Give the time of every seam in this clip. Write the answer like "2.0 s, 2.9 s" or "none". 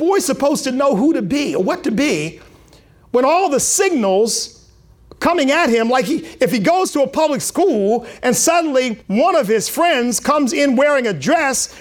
9.0 s